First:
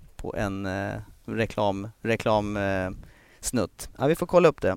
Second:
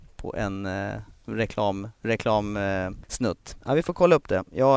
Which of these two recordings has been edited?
second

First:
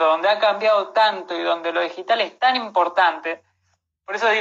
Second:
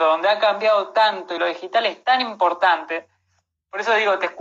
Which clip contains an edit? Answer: second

